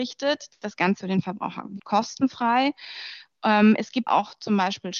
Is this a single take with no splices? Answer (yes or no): no